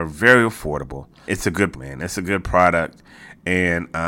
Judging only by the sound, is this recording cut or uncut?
cut